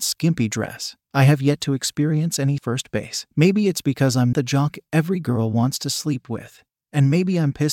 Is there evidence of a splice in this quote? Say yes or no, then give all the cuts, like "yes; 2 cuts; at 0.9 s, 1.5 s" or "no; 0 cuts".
yes; 4 cuts; at 1.0 s, 2.6 s, 3.3 s, 4.3 s